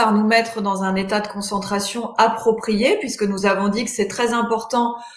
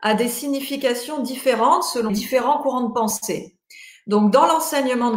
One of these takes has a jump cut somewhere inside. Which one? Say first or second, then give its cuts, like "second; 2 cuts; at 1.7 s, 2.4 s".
second; 1 cut; at 2.1 s